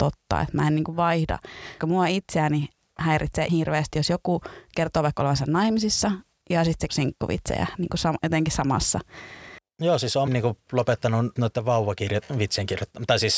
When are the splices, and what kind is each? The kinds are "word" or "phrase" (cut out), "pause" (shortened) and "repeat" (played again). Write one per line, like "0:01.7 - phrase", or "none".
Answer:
0:01.8 - word
0:03.5 - word
0:03.9 - word
0:06.9 - word
0:10.3 - word
0:11.4 - word